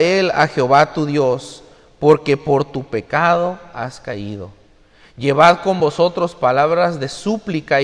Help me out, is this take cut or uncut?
uncut